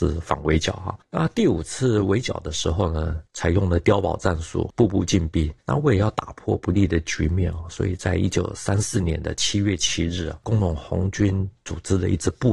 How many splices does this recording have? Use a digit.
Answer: 1